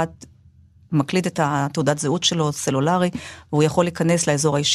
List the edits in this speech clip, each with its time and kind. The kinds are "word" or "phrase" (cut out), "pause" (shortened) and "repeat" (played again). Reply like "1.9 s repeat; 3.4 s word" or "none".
none